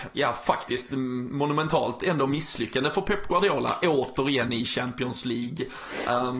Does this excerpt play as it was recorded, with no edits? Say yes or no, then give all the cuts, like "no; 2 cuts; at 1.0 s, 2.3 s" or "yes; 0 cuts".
yes; 0 cuts